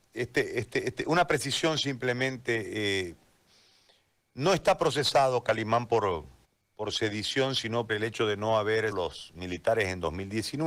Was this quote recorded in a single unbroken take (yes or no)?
no